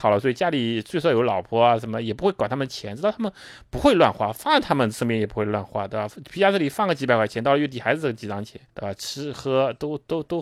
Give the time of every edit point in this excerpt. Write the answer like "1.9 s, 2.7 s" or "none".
8.7 s